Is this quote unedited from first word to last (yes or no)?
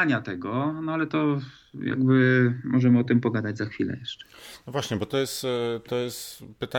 yes